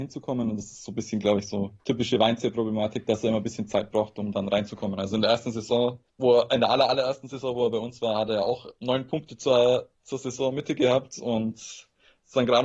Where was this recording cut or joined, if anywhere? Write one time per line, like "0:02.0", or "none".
0:01.8
0:06.1